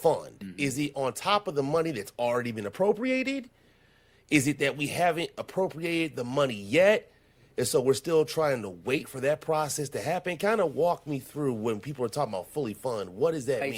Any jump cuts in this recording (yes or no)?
no